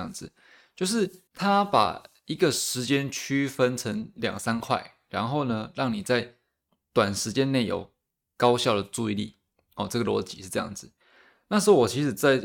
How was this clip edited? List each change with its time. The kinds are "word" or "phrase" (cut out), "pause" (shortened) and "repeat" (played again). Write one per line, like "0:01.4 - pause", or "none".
0:01.3 - pause